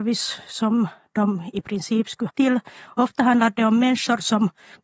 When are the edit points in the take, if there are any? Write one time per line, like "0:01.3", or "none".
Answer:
0:02.3